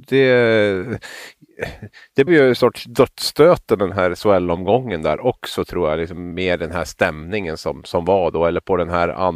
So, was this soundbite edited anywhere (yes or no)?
yes